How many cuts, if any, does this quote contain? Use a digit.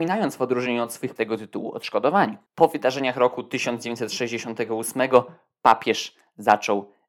2